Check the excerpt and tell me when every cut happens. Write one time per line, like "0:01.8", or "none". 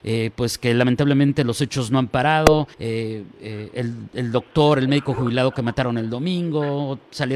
0:02.7